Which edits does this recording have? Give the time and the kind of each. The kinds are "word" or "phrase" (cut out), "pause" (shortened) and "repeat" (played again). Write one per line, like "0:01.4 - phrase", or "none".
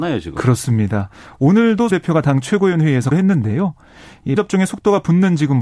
0:01.9 - word
0:03.1 - word
0:04.4 - word